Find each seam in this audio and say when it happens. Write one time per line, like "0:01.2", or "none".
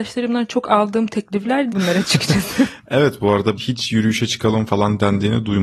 0:01.7
0:03.6